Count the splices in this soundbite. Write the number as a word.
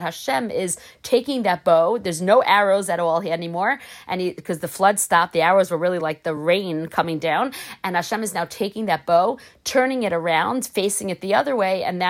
zero